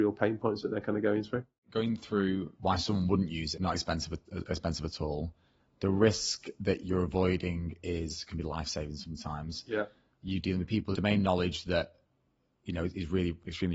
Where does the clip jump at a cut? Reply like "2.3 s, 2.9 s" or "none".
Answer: 2.5 s, 3.5 s, 10.9 s